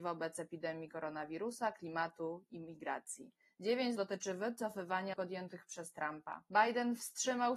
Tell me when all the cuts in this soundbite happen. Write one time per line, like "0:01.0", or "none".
0:04.0
0:05.1